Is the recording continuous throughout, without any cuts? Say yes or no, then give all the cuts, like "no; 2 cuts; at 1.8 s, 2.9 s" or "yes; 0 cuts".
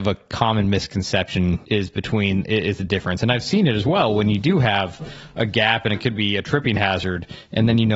no; 1 cut; at 1.6 s